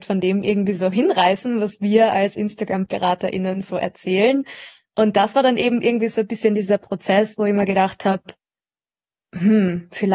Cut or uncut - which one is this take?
uncut